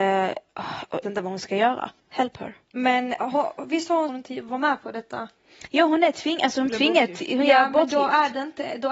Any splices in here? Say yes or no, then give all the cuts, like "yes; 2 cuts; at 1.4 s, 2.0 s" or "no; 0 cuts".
yes; 5 cuts; at 1.0 s, 2.0 s, 2.6 s, 4.1 s, 6.7 s